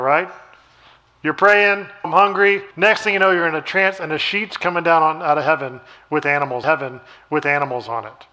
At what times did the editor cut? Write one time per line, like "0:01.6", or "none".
0:02.0
0:02.7
0:06.6